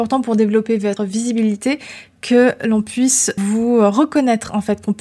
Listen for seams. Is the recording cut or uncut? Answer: cut